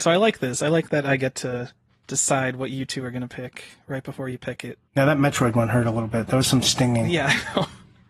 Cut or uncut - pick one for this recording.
cut